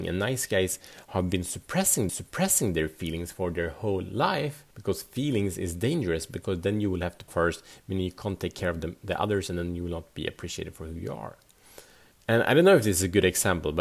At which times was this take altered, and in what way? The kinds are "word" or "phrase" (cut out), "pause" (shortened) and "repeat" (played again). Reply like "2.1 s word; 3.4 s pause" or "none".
2.1 s repeat; 4.7 s pause; 7.3 s phrase; 12.1 s pause